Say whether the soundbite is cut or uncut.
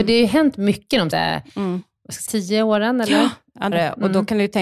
cut